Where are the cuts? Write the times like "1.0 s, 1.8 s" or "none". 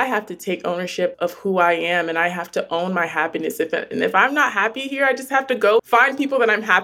5.8 s